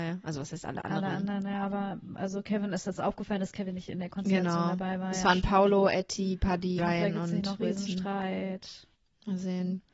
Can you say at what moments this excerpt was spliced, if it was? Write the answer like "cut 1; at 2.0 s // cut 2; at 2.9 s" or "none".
cut 1; at 6.8 s

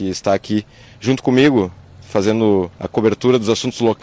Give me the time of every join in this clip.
cut 1; at 2.7 s

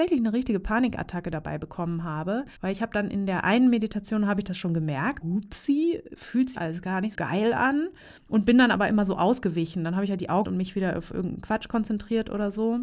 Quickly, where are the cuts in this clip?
cut 1; at 2.6 s // cut 2; at 5.2 s // cut 3; at 6.5 s // cut 4; at 7.1 s // cut 5; at 8.2 s // cut 6; at 10.4 s

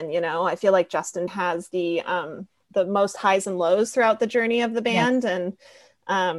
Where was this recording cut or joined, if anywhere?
cut 1; at 1.3 s // cut 2; at 2.6 s

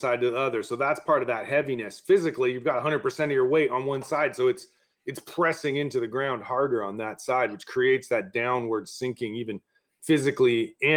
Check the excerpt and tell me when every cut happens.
none

